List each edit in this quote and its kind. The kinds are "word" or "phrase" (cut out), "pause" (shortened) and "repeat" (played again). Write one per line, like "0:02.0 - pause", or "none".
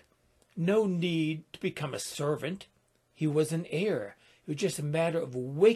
0:02.8 - pause